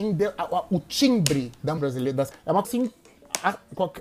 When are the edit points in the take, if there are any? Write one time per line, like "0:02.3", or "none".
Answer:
0:01.8
0:02.3
0:02.6